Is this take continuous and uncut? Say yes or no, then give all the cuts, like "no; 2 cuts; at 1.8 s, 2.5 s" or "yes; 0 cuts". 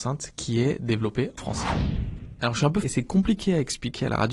no; 2 cuts; at 1.4 s, 2.8 s